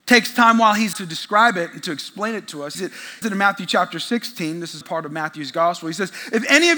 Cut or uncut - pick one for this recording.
cut